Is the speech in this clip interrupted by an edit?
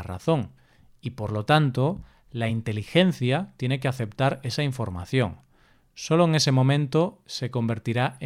no; 0 cuts

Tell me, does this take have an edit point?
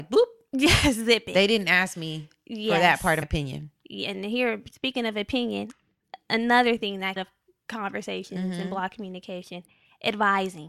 yes; 2 cuts; at 3.2 s, 7.2 s

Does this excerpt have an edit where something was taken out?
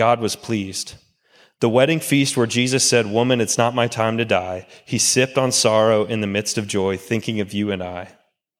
no; 0 cuts

